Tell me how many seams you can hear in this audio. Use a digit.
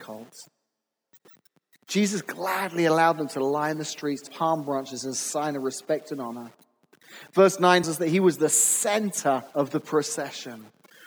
3